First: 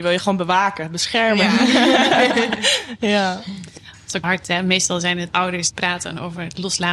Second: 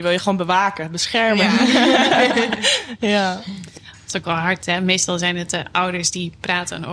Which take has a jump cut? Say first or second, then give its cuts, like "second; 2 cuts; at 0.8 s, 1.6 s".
first; 3 cuts; at 4.2 s, 5.3 s, 5.7 s